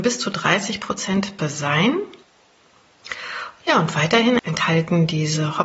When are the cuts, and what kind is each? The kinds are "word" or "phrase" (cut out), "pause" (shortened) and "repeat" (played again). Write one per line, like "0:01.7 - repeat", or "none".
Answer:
0:01.4 - word
0:04.4 - word